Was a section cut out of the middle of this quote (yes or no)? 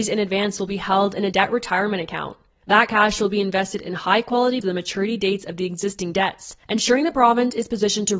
yes